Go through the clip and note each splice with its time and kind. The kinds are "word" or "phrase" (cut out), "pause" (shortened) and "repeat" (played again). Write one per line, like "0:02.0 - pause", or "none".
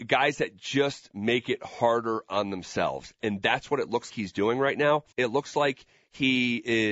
0:04.1 - word
0:05.1 - pause